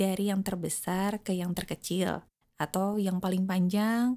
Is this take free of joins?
yes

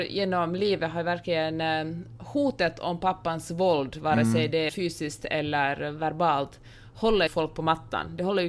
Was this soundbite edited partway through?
yes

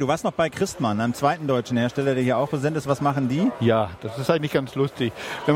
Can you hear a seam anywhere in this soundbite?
no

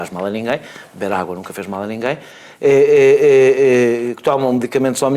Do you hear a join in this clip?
no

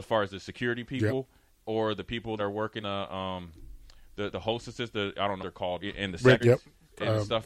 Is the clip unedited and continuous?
no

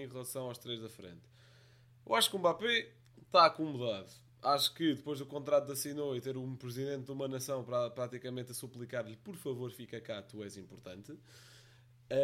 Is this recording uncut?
yes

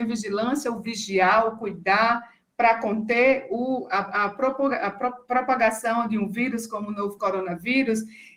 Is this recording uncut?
yes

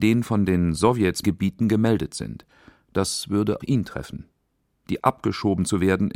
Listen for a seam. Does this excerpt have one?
yes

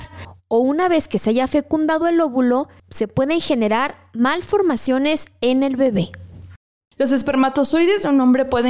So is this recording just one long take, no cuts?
yes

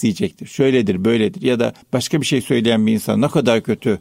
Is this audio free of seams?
no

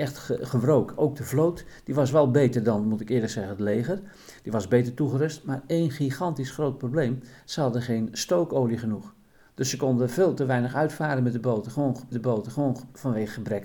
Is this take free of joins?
no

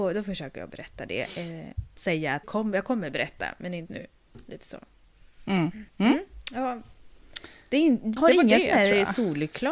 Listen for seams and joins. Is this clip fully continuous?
no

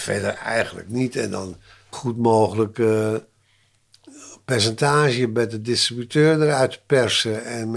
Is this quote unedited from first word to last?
no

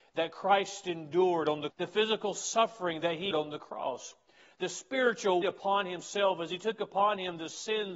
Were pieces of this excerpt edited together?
yes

